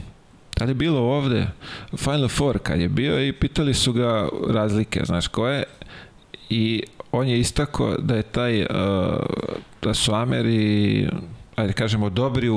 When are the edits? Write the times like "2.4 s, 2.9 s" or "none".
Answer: 11.5 s

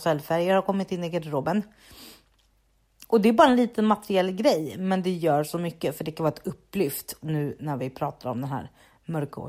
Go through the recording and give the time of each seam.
7.2 s

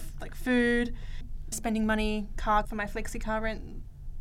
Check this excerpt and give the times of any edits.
1.5 s, 2.6 s

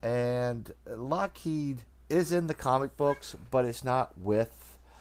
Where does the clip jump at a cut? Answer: 1.9 s

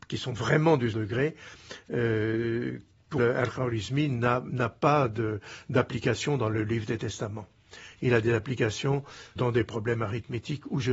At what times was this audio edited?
0.9 s, 3.2 s, 9.4 s

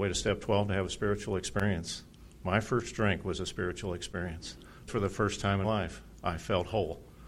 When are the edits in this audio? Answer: 4.9 s, 5.6 s

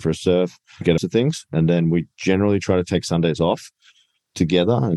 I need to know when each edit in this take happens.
1.0 s

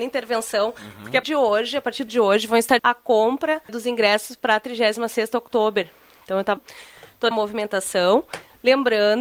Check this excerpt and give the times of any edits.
1.2 s, 2.1 s, 2.8 s, 3.7 s, 6.6 s, 7.3 s

